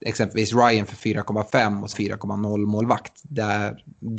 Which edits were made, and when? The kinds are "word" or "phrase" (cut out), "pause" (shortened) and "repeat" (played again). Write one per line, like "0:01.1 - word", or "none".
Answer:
0:01.9 - phrase